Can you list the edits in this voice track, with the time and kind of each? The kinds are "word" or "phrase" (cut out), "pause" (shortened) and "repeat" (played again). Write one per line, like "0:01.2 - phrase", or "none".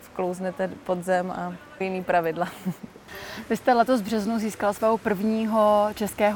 0:01.8 - phrase